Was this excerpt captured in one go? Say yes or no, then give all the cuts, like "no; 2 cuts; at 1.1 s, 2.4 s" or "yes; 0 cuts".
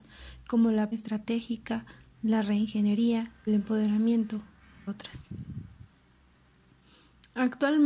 no; 3 cuts; at 0.9 s, 3.5 s, 4.9 s